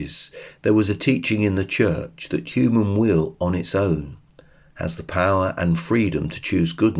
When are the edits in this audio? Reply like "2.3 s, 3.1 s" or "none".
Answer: none